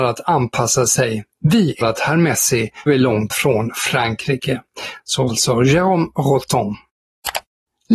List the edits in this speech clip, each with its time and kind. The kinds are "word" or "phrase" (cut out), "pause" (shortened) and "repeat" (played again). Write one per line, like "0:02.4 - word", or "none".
0:01.8 - word
0:02.9 - word
0:03.3 - word
0:05.3 - word